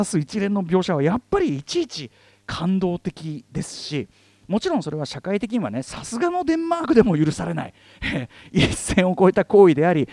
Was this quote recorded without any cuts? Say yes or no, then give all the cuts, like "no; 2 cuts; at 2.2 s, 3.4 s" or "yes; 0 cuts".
yes; 0 cuts